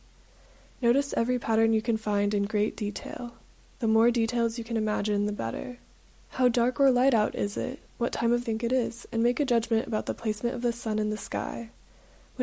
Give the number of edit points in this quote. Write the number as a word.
three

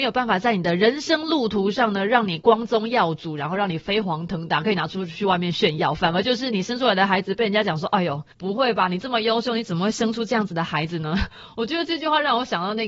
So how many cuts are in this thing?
one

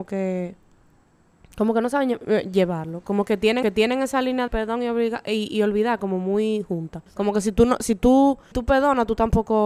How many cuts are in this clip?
four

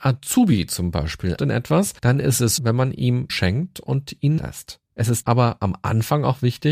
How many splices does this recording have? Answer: seven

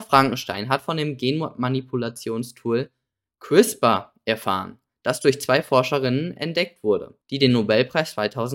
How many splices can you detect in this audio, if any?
one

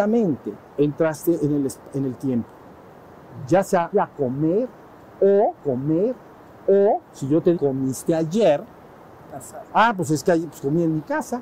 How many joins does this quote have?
four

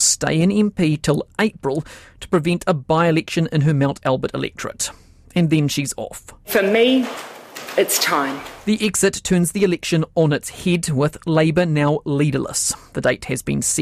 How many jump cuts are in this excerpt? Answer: zero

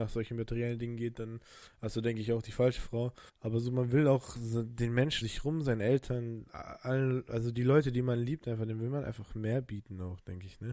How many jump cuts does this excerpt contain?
two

